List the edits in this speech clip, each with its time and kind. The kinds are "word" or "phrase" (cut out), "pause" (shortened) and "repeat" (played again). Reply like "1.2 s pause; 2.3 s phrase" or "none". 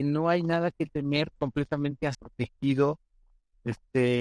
1.4 s word; 2.1 s word